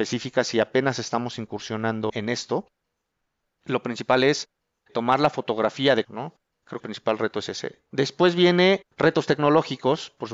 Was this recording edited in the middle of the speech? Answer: yes; 4 cuts; at 2.1 s, 6.0 s, 6.8 s, 8.9 s

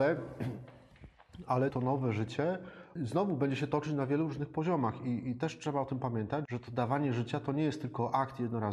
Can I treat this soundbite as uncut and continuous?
no; 3 cuts; at 1.7 s, 3.0 s, 6.5 s

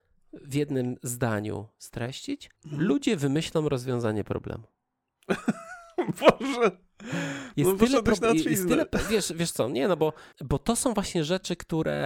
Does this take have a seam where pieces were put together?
yes; 2 cuts; at 2.5 s, 10.3 s

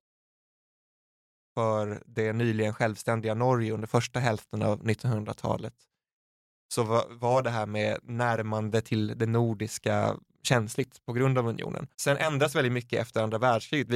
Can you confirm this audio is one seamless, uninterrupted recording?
no; 1 cut; at 11.9 s

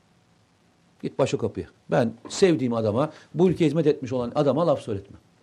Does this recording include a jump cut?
yes; 1 cut; at 1.7 s

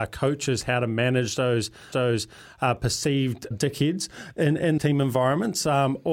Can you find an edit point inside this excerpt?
yes; 3 cuts; at 1.9 s, 3.5 s, 4.8 s

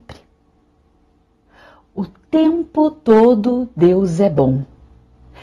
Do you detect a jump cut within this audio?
no; 0 cuts

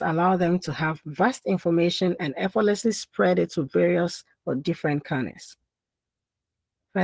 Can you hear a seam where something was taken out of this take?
no; 0 cuts

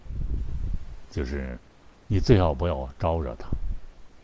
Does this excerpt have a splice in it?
no; 0 cuts

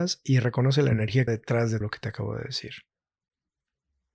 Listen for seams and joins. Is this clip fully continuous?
no; 2 cuts; at 1.3 s, 1.8 s

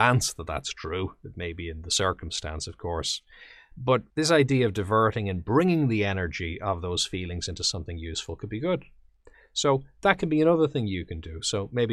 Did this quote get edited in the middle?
yes; 1 cut; at 4.1 s

